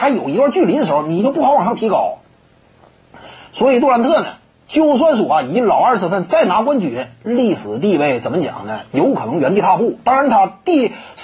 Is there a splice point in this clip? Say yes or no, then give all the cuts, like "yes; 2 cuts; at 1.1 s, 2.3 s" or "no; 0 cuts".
no; 0 cuts